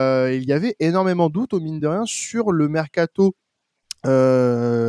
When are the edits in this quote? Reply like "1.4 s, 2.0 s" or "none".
none